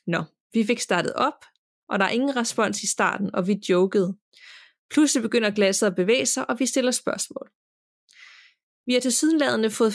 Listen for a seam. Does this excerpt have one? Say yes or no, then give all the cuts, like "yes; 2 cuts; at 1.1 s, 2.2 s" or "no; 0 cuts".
no; 0 cuts